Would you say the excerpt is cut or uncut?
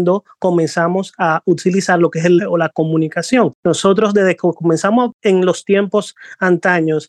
cut